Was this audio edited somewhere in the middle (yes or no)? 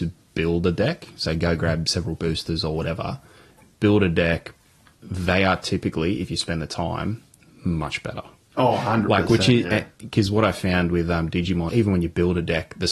yes